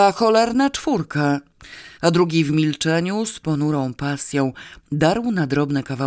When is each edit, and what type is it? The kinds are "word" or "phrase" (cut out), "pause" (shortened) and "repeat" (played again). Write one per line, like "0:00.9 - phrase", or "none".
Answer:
0:01.9 - pause